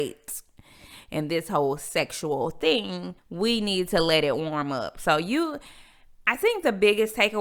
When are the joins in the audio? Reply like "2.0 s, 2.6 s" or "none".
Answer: 3.2 s